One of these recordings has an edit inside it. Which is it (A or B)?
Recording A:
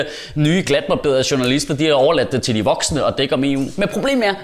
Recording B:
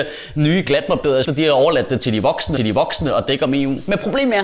B